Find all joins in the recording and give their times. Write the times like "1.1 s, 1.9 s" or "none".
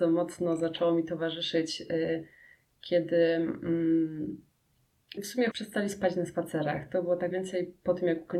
5.2 s, 5.5 s, 7.3 s